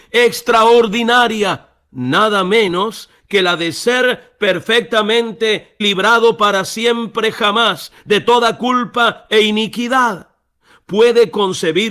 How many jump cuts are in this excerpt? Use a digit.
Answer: 1